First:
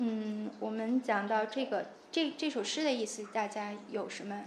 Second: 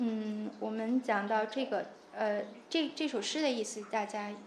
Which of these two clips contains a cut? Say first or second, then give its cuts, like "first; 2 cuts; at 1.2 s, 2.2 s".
first; 1 cut; at 2.1 s